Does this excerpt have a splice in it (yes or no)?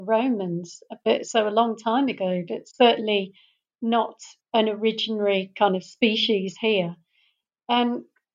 no